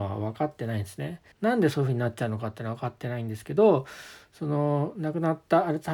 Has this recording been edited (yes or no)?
yes